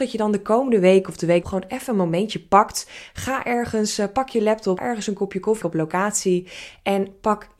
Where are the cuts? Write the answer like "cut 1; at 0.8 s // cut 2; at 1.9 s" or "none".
cut 1; at 1.4 s // cut 2; at 4.8 s // cut 3; at 5.6 s